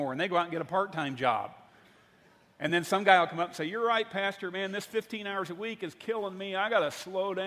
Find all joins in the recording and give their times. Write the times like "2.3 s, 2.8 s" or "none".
none